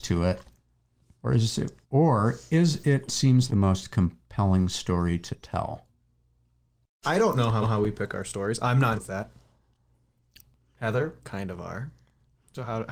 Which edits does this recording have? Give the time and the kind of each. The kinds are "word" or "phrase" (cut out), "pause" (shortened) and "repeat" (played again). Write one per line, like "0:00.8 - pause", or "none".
0:01.8 - pause
0:03.1 - word
0:03.5 - word
0:07.6 - repeat
0:09.0 - word
0:11.2 - word